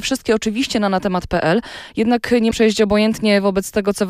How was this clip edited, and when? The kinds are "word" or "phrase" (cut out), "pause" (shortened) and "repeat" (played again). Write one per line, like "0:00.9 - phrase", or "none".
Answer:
0:02.5 - word